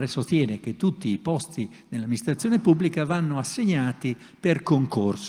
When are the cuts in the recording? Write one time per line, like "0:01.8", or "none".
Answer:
none